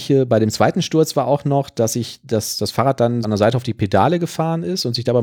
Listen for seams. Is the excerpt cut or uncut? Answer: cut